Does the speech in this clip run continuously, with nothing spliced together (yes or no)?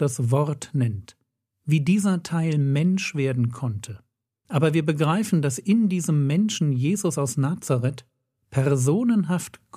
yes